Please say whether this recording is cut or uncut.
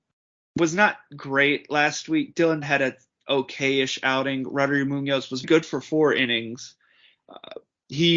cut